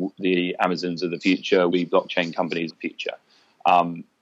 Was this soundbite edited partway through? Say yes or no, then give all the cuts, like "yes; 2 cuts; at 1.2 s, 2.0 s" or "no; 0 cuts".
yes; 2 cuts; at 1.7 s, 2.7 s